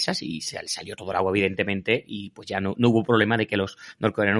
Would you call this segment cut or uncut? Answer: uncut